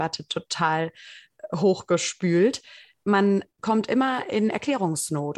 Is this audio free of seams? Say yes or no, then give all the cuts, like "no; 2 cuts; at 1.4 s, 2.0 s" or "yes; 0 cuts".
no; 1 cut; at 3.5 s